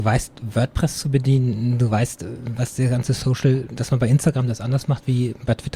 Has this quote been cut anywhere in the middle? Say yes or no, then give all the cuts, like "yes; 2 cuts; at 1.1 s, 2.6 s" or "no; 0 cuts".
no; 0 cuts